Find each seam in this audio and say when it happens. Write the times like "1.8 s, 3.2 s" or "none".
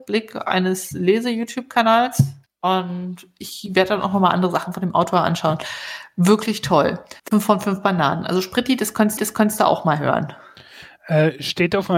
2.5 s, 7.2 s, 9.2 s